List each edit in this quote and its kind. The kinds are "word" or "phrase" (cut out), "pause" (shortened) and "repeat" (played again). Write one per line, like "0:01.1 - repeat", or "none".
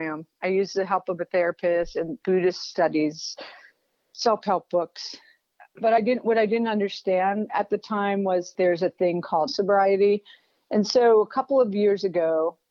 0:02.2 - word
0:08.5 - word
0:09.5 - word